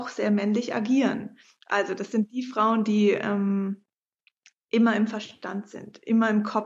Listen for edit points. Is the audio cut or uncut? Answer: uncut